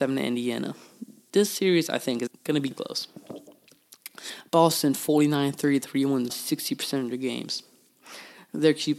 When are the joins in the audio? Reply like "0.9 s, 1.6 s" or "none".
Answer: 2.3 s, 2.7 s, 6.3 s